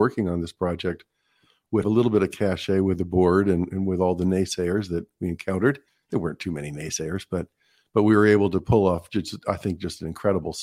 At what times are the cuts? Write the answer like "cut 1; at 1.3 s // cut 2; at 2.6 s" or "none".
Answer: cut 1; at 1.8 s // cut 2; at 5.9 s